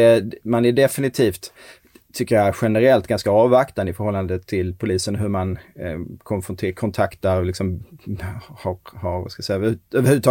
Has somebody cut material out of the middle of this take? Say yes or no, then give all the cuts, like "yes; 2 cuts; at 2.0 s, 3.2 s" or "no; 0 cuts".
no; 0 cuts